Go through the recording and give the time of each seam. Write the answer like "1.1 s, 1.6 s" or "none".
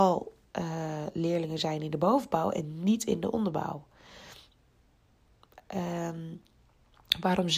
none

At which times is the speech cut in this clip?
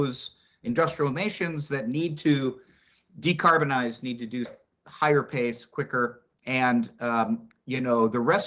4.4 s

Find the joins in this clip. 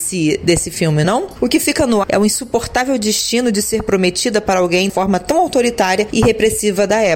1.0 s, 2.0 s, 4.9 s

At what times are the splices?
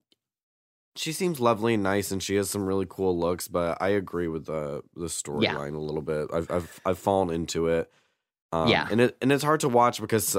none

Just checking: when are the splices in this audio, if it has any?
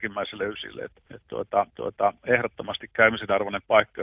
1.1 s, 1.7 s

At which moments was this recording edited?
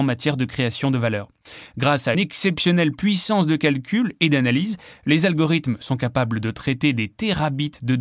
2.1 s

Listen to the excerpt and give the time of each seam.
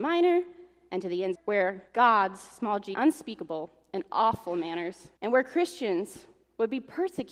1.3 s, 1.9 s, 2.9 s, 5.2 s

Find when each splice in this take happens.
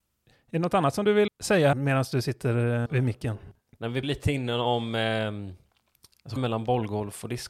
1.3 s, 1.7 s, 2.9 s, 4.0 s, 6.4 s

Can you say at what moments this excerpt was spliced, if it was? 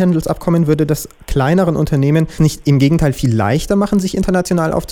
2.4 s

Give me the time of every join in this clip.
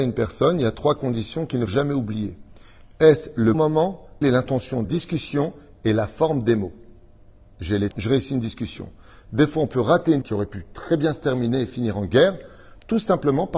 1.7 s, 3.5 s, 4.2 s, 4.8 s, 7.9 s, 10.2 s

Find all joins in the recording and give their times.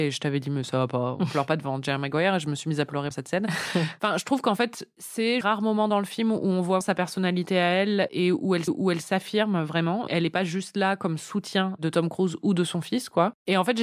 3.1 s, 5.4 s, 6.8 s, 8.7 s

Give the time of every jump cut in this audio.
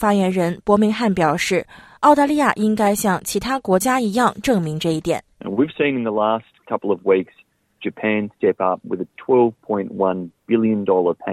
none

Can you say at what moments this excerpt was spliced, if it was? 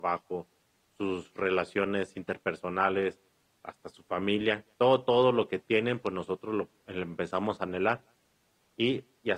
4.7 s

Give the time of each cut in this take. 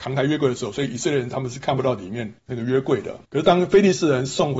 2.4 s, 3.2 s

